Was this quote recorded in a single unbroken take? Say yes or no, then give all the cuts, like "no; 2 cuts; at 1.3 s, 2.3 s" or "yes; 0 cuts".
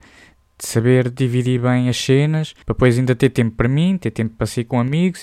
no; 1 cut; at 2.6 s